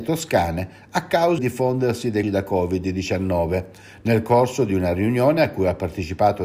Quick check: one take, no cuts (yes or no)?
no